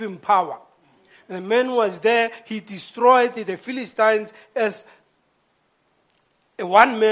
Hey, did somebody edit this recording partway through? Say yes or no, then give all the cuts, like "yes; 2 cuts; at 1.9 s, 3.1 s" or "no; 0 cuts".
no; 0 cuts